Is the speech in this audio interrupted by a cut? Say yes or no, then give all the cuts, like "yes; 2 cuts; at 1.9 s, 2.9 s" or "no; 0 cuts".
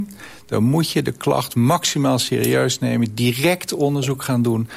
no; 0 cuts